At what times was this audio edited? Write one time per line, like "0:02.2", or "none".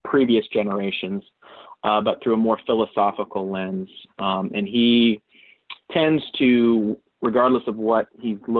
0:05.8

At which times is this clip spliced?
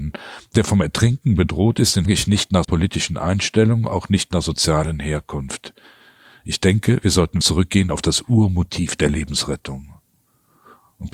0:02.1
0:02.6
0:04.4
0:07.4

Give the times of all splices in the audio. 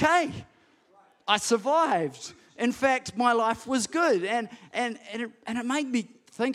none

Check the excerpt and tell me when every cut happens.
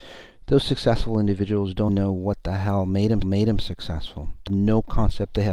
0:01.9
0:03.2
0:04.5

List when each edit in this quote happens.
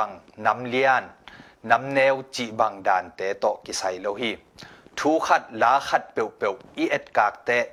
none

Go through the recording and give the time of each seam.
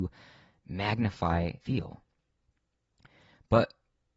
0:01.6

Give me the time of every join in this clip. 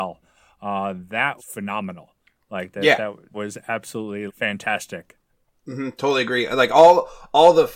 0:01.4
0:03.3
0:04.3

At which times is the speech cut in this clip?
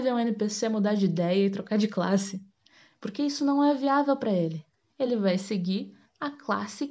none

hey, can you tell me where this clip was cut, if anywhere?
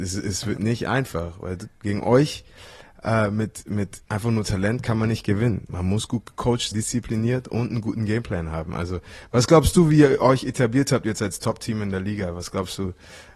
0:04.1
0:06.7

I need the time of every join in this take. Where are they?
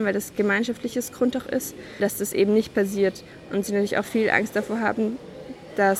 none

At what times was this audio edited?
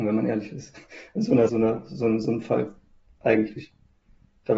0:01.5

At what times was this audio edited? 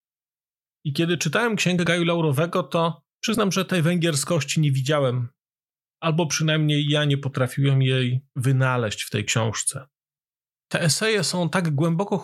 none

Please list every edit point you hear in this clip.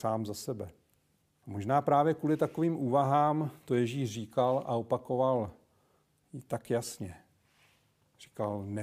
0:01.2

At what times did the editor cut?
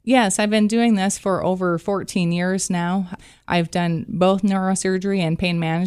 none

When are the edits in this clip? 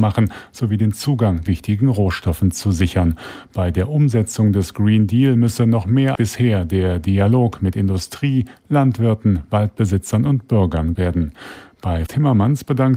0:01.5
0:06.2
0:11.0
0:12.1

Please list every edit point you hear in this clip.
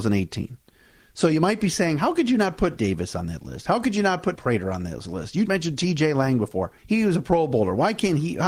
0:02.8
0:04.4
0:05.5
0:06.8

